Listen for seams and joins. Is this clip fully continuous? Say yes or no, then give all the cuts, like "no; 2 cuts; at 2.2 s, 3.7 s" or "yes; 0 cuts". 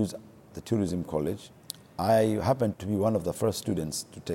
no; 1 cut; at 2.7 s